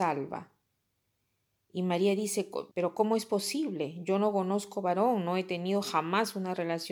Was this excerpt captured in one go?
no; 1 cut; at 2.7 s

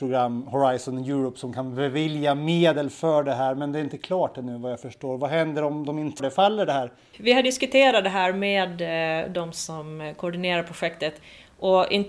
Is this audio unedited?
no; 1 cut; at 6.2 s

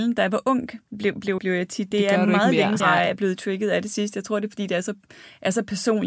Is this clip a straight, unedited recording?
no; 3 cuts; at 1.4 s, 1.9 s, 2.8 s

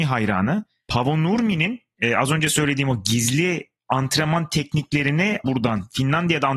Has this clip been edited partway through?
yes; 1 cut; at 5.4 s

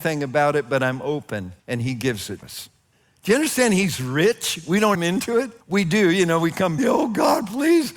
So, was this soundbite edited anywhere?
yes; 6 cuts; at 1.6 s, 2.4 s, 2.9 s, 4.9 s, 5.6 s, 6.8 s

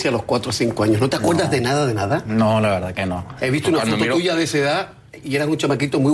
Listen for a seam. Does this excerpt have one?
no; 0 cuts

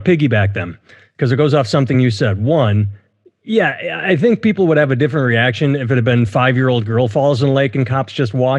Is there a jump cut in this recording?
no; 0 cuts

